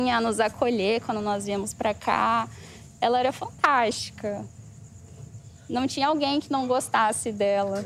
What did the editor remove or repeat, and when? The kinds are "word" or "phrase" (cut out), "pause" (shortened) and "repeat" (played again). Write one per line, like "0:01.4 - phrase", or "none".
none